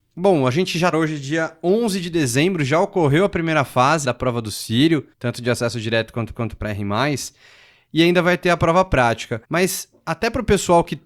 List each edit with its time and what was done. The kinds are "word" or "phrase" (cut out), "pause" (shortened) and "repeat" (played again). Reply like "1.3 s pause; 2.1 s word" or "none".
0.9 s phrase; 4.0 s word; 5.1 s pause; 6.3 s repeat; 9.4 s pause